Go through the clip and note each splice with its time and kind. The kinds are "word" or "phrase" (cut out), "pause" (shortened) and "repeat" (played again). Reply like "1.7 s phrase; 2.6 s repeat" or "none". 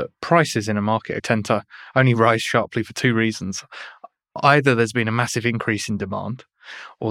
1.2 s word